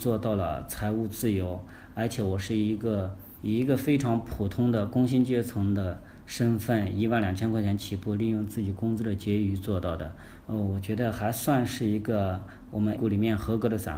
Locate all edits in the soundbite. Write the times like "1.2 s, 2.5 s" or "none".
10.4 s, 13.0 s